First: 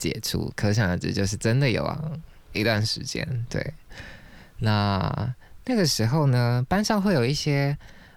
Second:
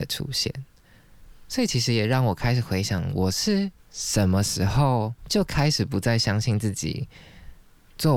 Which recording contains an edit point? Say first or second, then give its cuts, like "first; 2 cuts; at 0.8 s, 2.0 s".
second; 2 cuts; at 3.8 s, 5.2 s